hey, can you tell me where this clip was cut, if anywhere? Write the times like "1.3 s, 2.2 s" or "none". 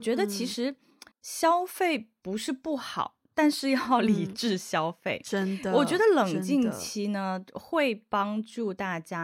1.1 s